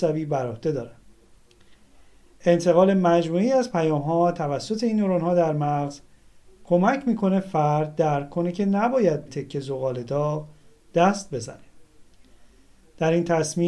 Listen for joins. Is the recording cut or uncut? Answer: cut